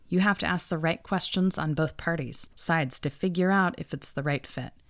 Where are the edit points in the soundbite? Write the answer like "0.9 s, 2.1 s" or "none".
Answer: 2.5 s